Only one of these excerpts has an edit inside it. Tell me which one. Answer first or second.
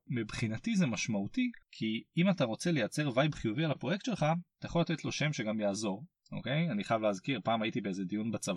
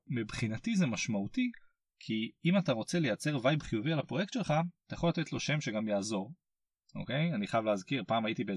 first